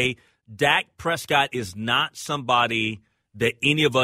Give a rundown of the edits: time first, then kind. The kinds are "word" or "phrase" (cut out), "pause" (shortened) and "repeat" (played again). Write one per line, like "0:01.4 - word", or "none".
none